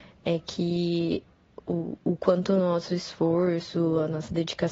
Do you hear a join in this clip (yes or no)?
no